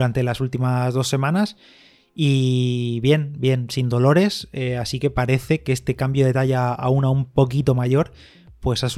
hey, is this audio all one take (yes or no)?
yes